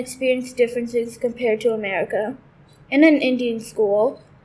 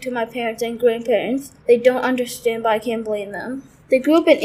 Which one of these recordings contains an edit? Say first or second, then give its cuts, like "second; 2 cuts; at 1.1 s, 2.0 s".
second; 1 cut; at 1.6 s